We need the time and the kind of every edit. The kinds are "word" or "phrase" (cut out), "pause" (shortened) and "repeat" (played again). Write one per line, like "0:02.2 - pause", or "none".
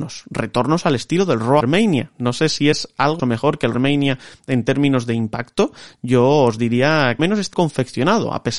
0:01.6 - word
0:02.7 - word
0:03.2 - word
0:03.7 - phrase
0:07.2 - phrase
0:07.5 - word